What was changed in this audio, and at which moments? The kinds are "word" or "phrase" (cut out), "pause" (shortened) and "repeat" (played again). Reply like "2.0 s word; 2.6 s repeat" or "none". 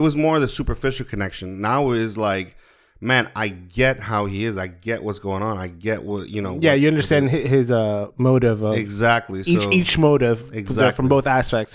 none